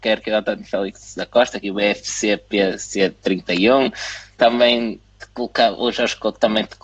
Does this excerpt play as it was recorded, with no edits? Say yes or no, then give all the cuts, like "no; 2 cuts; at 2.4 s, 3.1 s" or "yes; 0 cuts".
yes; 0 cuts